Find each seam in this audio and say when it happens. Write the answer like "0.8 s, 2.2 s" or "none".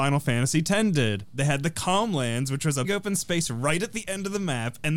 2.8 s